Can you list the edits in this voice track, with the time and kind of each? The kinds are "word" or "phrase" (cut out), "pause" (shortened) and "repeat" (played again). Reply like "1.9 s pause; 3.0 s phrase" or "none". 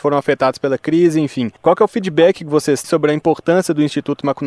1.6 s pause; 2.8 s word

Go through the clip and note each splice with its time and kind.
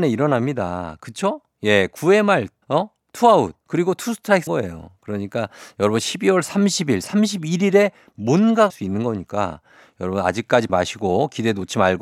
2.6 s pause; 3.6 s pause; 4.5 s phrase; 8.7 s word; 10.7 s word

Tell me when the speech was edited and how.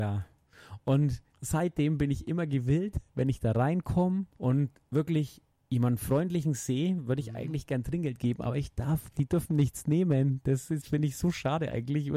1.3 s pause; 4.3 s pause; 5.5 s pause

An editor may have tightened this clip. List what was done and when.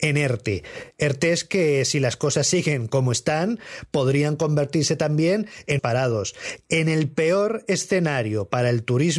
5.8 s word

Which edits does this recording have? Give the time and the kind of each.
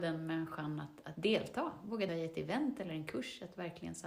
1.1 s word; 2.1 s word

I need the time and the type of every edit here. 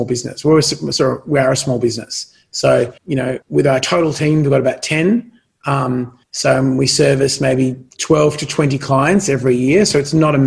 3.0 s pause; 3.4 s pause; 6.2 s pause

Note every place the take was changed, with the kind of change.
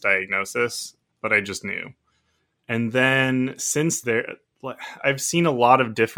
4.0 s word; 5.0 s word

